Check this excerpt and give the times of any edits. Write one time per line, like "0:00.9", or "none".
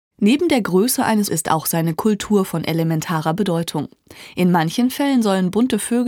0:01.3